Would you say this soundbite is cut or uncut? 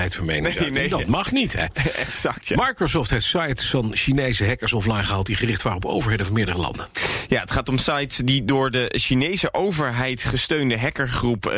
uncut